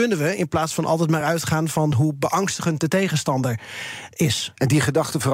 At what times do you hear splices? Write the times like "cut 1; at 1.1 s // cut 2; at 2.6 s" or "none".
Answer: none

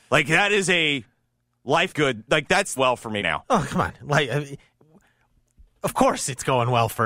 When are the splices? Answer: cut 1; at 1.9 s // cut 2; at 2.8 s // cut 3; at 3.2 s

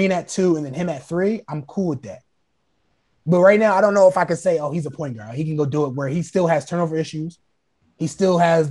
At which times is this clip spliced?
none

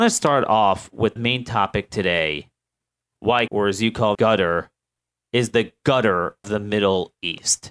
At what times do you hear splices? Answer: cut 1; at 1.2 s // cut 2; at 3.5 s // cut 3; at 4.1 s // cut 4; at 6.4 s

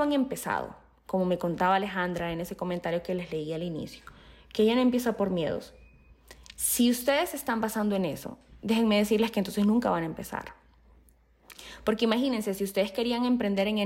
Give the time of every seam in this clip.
none

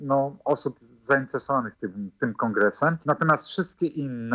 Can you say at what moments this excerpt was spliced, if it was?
cut 1; at 3.0 s

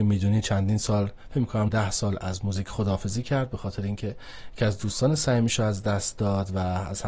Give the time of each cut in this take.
cut 1; at 1.7 s

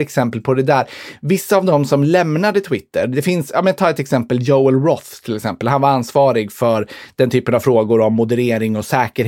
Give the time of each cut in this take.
none

